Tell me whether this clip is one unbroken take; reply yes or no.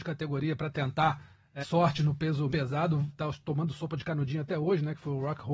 no